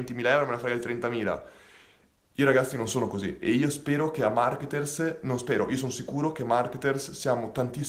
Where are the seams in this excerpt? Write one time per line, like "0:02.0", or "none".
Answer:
none